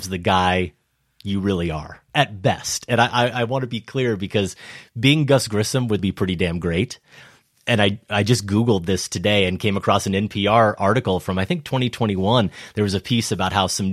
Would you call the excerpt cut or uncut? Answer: cut